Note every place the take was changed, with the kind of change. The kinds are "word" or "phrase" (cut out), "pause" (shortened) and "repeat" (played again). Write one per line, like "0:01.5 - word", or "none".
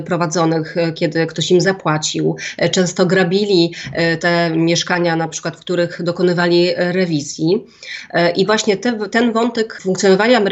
none